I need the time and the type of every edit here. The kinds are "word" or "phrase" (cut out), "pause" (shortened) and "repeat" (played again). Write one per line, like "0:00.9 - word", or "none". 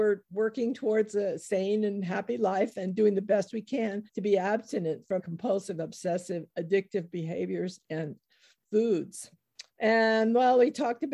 0:04.1 - pause
0:05.2 - word
0:09.7 - pause